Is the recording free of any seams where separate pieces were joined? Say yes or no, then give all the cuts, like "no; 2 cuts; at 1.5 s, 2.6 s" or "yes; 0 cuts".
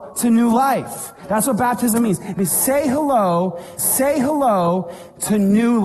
no; 1 cut; at 3.8 s